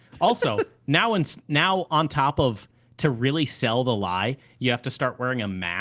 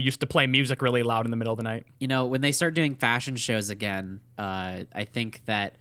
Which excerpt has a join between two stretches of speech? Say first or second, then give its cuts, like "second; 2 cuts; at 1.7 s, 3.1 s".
second; 2 cuts; at 1.9 s, 4.3 s